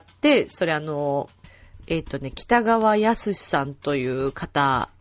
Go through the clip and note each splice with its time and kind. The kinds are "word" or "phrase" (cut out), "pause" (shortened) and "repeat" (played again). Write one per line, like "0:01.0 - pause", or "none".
none

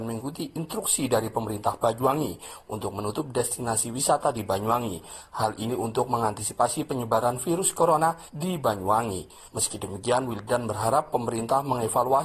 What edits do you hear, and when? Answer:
none

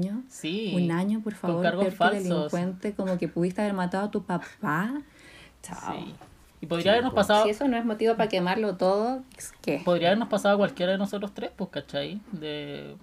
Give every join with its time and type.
none

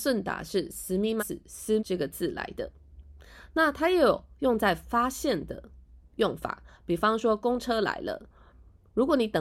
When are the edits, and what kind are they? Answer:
0:01.2 - word
0:01.8 - word

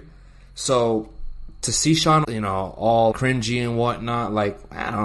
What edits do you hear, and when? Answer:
0:02.2 - word
0:03.1 - word

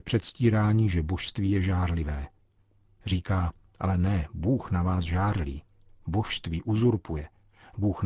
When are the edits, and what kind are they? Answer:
none

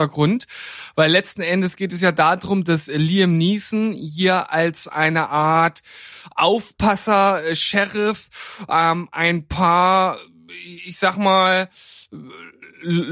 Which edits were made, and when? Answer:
none

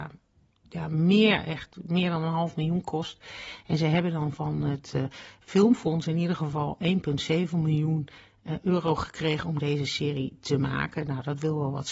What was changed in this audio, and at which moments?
none

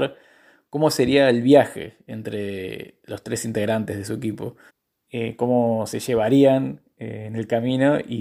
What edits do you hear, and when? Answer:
0:04.7 - pause

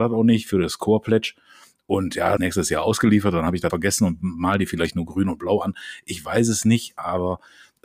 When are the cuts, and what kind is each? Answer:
0:02.4 - phrase
0:03.7 - word

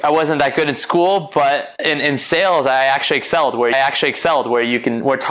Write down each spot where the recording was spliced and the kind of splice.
0:03.7 - repeat

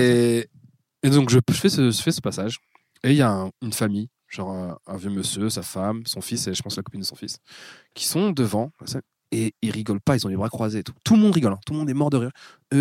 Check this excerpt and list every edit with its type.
0:03.5 - pause

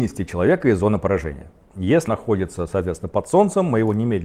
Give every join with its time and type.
0:02.1 - word

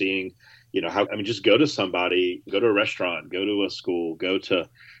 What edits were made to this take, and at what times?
0:01.1 - word
0:02.5 - word

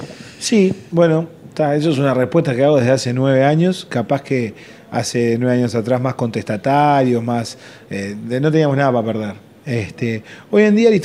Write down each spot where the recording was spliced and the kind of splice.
none

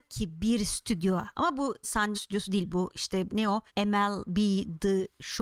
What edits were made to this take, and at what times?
0:01.8 - phrase
0:02.1 - word
0:03.3 - word
0:03.7 - pause

